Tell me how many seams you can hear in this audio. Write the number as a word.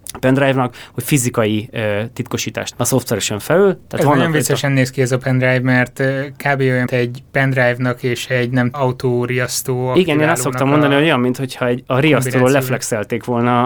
four